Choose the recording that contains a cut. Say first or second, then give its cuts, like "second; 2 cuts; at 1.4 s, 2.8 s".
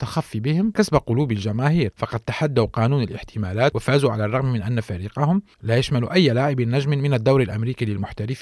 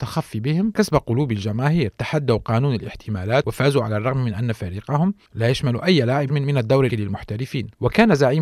second; 3 cuts; at 1.9 s, 6.3 s, 6.9 s